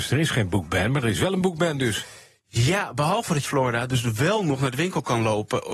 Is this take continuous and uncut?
no; 1 cut; at 3.4 s

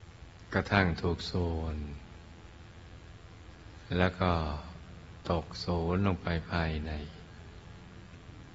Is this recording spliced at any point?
no; 0 cuts

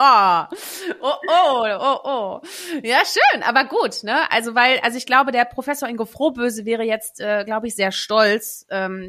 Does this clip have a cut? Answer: no; 0 cuts

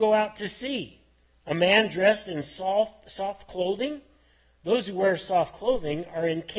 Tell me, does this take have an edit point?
no; 0 cuts

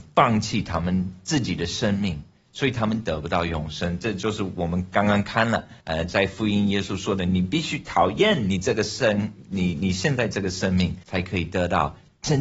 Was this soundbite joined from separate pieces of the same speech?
yes; 2 cuts; at 5.8 s, 11.0 s

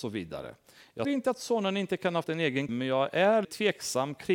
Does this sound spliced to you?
yes; 4 cuts; at 1.0 s, 2.2 s, 2.7 s, 3.4 s

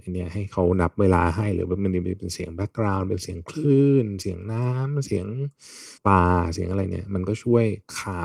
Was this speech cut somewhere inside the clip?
yes; 1 cut; at 6.0 s

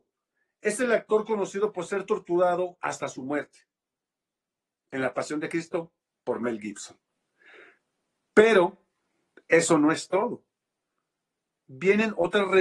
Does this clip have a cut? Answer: no; 0 cuts

